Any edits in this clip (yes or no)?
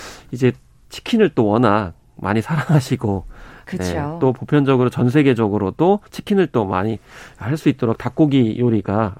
yes